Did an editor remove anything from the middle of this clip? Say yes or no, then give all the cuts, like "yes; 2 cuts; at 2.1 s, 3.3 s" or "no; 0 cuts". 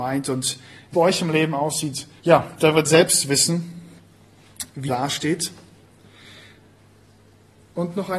yes; 4 cuts; at 0.9 s, 2.2 s, 2.8 s, 4.9 s